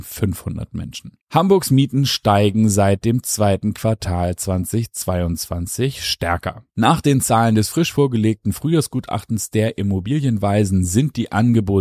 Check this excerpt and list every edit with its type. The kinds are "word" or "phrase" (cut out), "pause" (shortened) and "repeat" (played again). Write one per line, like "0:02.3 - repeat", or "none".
0:01.2 - pause
0:06.7 - pause